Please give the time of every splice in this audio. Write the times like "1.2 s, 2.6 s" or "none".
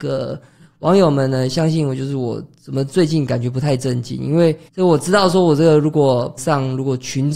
4.7 s, 6.4 s

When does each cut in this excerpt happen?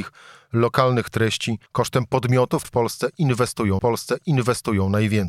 1.7 s, 2.6 s, 3.8 s

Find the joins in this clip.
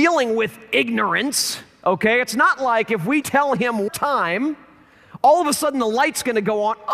3.2 s, 3.9 s

